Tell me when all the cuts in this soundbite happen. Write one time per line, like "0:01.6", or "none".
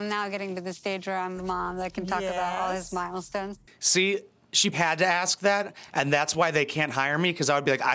0:01.4
0:04.7